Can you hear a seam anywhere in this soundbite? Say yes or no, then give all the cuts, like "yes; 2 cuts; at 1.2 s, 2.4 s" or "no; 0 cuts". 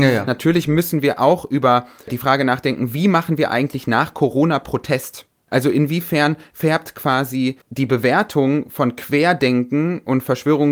yes; 1 cut; at 7.6 s